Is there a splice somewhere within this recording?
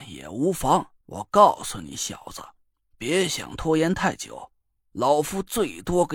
yes; 1 cut; at 1.0 s

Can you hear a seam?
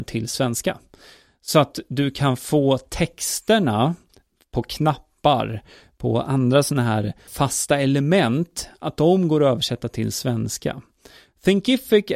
yes; 1 cut; at 7.3 s

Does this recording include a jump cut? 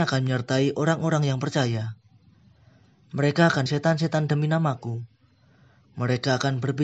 yes; 1 cut; at 3.7 s

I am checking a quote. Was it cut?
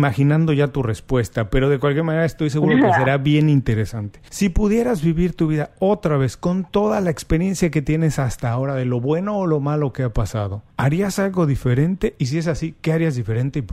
no; 0 cuts

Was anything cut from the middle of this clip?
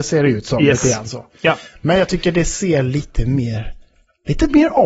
no; 0 cuts

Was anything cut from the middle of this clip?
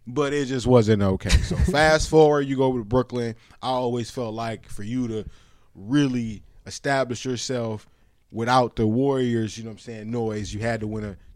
no; 0 cuts

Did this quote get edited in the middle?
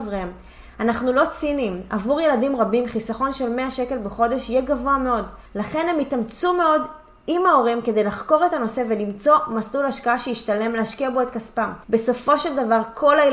yes; 2 cuts; at 5.5 s, 11.8 s

